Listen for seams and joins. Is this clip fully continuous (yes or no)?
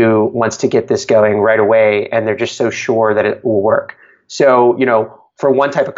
yes